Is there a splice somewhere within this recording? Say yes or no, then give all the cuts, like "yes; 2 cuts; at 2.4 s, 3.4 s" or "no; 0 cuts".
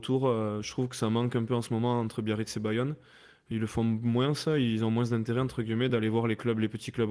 no; 0 cuts